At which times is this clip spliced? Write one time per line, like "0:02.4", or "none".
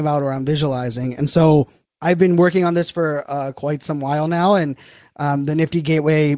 0:01.8